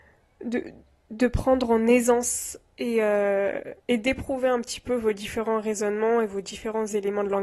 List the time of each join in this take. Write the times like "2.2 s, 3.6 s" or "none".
3.8 s